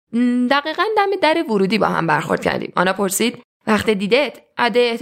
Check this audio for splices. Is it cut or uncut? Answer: uncut